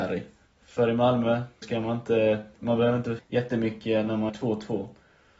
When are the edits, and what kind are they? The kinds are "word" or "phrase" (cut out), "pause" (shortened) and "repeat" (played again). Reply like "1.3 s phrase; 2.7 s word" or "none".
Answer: 1.6 s word; 2.5 s pause; 3.2 s word; 4.3 s word